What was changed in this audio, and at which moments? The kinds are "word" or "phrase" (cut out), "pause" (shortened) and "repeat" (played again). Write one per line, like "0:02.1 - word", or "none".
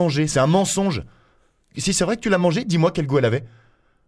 none